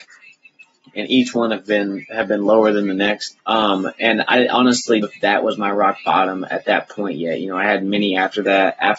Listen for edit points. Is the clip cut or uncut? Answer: cut